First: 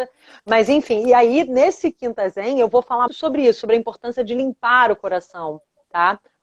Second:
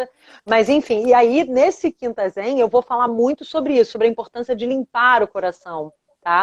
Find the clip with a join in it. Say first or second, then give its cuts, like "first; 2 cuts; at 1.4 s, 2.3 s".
first; 1 cut; at 3.1 s